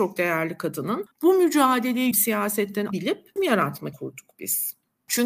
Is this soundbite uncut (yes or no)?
no